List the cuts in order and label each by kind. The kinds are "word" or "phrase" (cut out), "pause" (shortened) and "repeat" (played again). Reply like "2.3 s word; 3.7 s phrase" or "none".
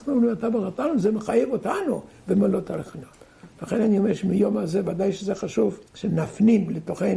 5.9 s pause

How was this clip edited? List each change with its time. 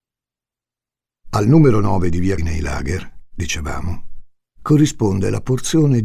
2.4 s word

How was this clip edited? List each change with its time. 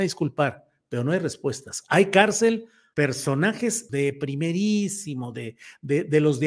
2.9 s word; 3.9 s word

